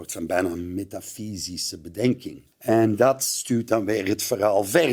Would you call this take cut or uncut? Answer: cut